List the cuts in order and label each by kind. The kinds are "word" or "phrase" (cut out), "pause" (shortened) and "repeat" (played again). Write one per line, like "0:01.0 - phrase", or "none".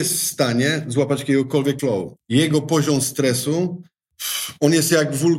0:01.8 - word